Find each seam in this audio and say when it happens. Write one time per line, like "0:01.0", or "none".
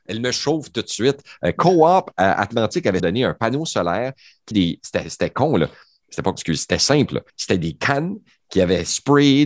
0:03.0
0:04.5
0:06.3
0:07.3